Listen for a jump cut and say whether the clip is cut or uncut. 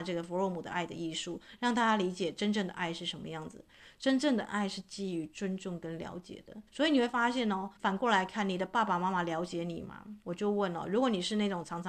cut